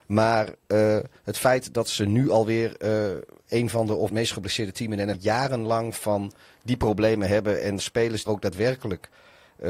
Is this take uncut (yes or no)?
no